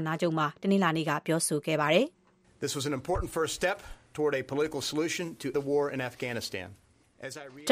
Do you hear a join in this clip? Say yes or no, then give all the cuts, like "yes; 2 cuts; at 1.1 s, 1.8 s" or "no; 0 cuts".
yes; 1 cut; at 5.5 s